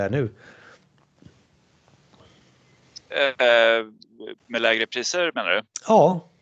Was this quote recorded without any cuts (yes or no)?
yes